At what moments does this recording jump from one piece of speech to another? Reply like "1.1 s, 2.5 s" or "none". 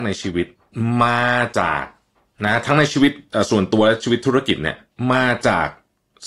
none